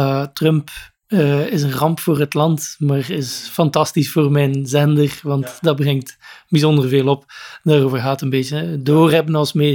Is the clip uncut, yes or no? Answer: yes